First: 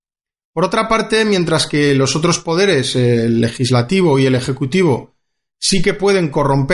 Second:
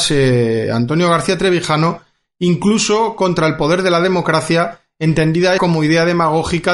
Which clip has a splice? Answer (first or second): second